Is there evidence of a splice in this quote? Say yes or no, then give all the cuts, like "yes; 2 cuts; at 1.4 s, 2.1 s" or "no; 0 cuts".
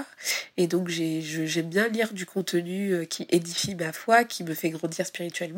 no; 0 cuts